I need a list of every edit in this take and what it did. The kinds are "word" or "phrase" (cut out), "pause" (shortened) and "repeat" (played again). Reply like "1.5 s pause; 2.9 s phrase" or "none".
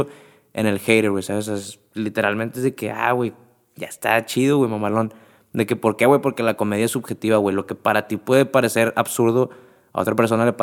none